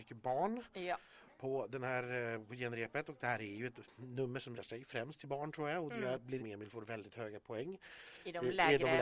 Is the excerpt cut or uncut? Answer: cut